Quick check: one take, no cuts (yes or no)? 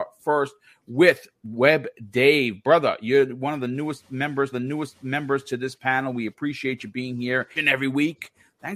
no